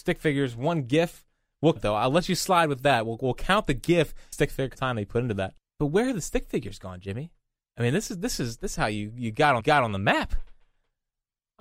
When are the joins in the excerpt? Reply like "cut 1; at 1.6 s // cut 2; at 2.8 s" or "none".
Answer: cut 1; at 1.8 s // cut 2; at 4.3 s // cut 3; at 4.7 s // cut 4; at 7.6 s // cut 5; at 8.7 s // cut 6; at 9.6 s